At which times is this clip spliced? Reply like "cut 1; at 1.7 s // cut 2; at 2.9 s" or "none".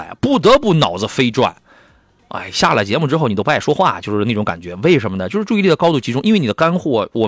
none